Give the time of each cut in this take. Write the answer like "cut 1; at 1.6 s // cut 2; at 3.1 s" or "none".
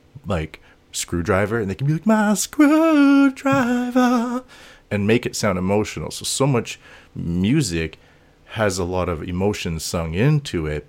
none